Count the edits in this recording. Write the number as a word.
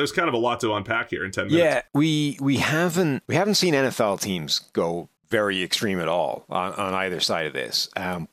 three